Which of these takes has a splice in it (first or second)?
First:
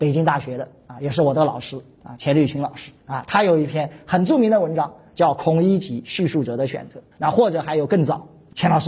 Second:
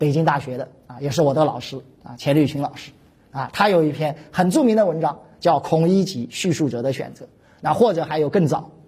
first